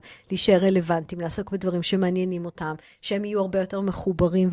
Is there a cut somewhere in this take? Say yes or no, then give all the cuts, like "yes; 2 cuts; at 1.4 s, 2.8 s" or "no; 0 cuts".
no; 0 cuts